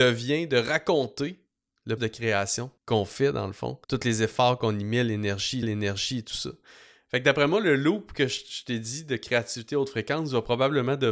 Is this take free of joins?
no; 4 cuts; at 2.0 s, 2.8 s, 3.8 s, 5.6 s

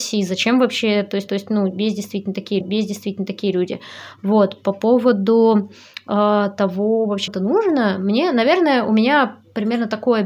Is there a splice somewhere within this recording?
yes; 3 cuts; at 1.3 s, 2.6 s, 7.3 s

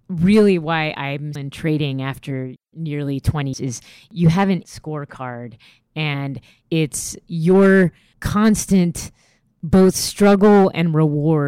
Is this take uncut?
no; 3 cuts; at 1.4 s, 3.5 s, 4.6 s

